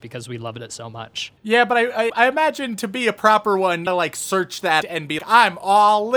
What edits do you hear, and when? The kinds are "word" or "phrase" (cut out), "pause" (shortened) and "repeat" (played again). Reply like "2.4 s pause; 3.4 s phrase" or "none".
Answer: 2.1 s word; 3.9 s phrase; 4.8 s word; 5.2 s word